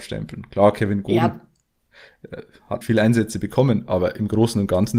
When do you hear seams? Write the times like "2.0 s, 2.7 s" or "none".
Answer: 2.8 s

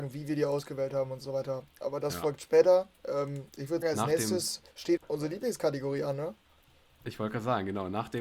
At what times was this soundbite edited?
3.8 s, 5.0 s

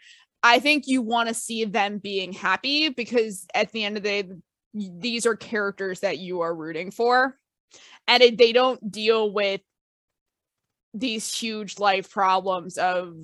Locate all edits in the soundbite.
none

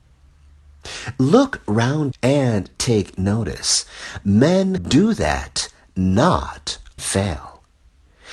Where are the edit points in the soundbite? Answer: 2.1 s, 4.8 s, 7.0 s

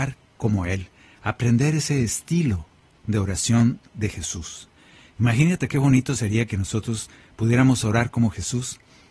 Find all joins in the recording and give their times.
none

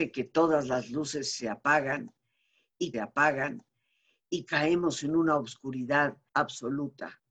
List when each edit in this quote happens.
2.9 s, 6.3 s

